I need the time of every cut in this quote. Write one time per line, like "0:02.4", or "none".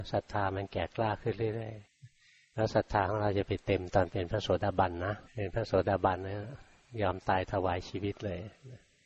0:01.8
0:05.2